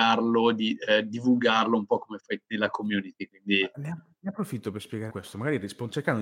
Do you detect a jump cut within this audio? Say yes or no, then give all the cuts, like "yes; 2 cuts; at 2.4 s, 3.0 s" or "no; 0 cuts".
yes; 2 cuts; at 2.4 s, 5.1 s